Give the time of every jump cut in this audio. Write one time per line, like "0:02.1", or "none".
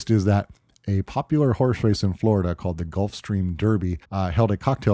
0:04.0